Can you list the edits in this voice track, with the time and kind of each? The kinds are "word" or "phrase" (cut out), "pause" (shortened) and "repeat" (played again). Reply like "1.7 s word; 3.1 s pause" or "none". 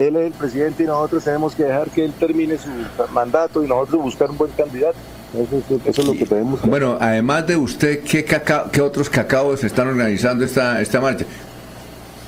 none